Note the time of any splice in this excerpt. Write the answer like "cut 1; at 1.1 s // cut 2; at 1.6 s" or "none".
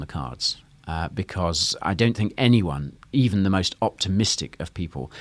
none